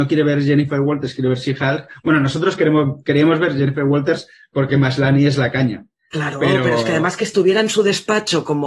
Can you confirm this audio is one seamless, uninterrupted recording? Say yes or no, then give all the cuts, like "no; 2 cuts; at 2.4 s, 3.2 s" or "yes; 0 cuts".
yes; 0 cuts